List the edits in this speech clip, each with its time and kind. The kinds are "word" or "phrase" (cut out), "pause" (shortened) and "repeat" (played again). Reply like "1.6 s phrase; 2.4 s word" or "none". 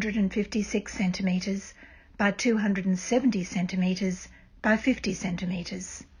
none